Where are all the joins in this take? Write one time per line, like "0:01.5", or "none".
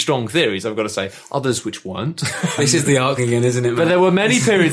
0:02.6
0:03.2

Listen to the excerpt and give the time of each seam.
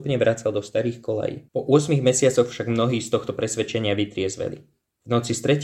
0:01.5

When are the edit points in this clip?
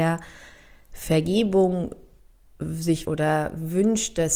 0:03.0

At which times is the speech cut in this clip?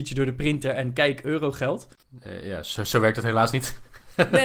none

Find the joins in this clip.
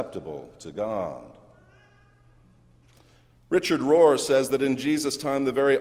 none

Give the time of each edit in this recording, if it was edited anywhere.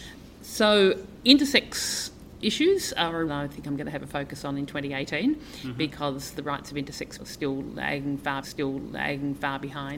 0:03.3
0:07.2
0:08.4

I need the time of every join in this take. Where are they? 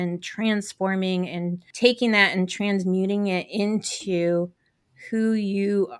none

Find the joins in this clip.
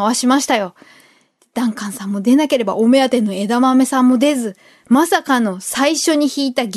none

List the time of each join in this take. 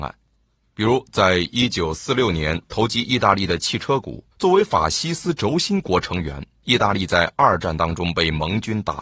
0:04.3

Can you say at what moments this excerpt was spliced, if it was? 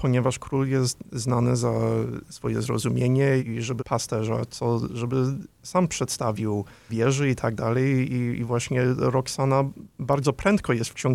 0:03.4
0:03.8
0:06.9

